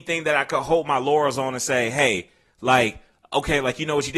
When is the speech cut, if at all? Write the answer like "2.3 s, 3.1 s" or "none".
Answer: none